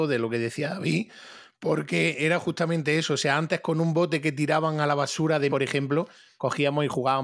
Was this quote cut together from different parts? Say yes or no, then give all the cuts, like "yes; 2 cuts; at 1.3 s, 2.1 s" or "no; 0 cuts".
yes; 1 cut; at 5.5 s